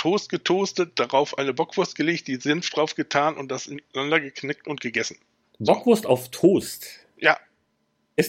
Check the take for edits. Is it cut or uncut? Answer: uncut